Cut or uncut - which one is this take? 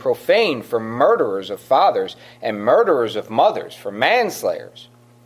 uncut